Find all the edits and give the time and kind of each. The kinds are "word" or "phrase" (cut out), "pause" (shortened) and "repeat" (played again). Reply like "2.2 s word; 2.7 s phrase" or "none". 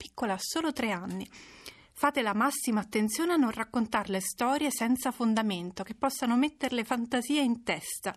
none

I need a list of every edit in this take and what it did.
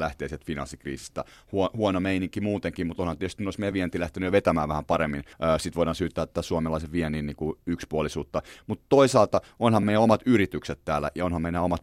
3.7 s word; 5.3 s pause; 9.8 s word

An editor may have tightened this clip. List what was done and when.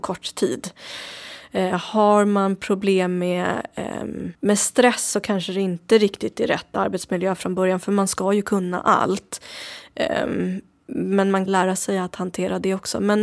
4.3 s pause; 11.5 s phrase

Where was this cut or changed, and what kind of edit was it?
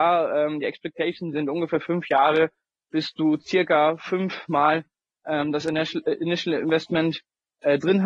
none

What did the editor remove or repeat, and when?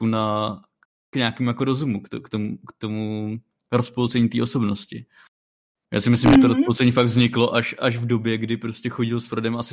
none

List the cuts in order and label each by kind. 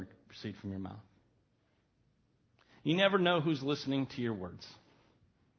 none

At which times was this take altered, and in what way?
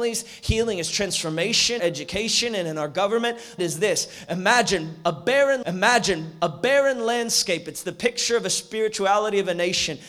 1.8 s phrase; 3.6 s phrase; 5.6 s repeat

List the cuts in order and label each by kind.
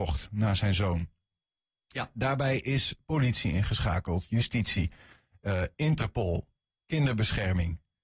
none

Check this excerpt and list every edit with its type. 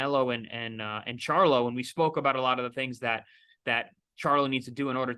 none

